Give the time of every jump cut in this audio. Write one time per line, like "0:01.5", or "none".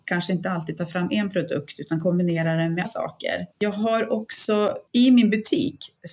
0:02.8
0:03.5
0:04.9